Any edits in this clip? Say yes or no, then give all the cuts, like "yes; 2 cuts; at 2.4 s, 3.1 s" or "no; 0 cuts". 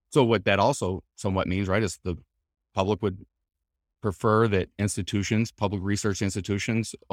no; 0 cuts